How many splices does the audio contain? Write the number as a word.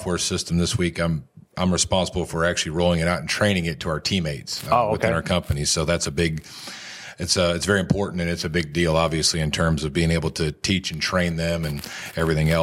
zero